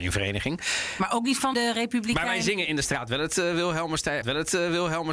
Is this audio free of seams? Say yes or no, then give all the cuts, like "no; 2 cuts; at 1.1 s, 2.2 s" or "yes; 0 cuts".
no; 2 cuts; at 1.5 s, 4.2 s